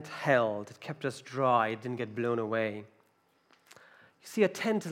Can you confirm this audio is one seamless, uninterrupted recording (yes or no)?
yes